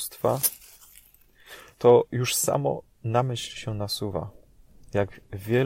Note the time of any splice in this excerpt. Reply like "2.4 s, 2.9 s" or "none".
1.7 s